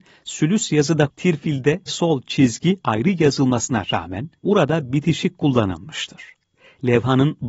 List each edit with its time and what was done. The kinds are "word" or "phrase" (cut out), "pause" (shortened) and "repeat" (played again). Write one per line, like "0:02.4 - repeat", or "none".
0:01.1 - word
0:01.9 - phrase
0:02.8 - word
0:04.4 - pause